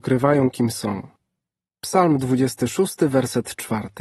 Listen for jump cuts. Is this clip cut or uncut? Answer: uncut